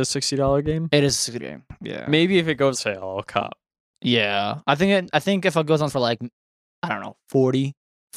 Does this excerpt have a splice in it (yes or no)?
yes